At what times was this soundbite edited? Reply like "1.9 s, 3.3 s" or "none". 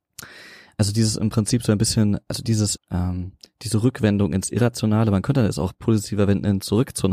2.8 s